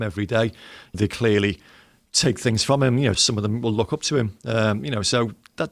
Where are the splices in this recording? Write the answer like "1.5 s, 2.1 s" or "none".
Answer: 0.9 s, 3.1 s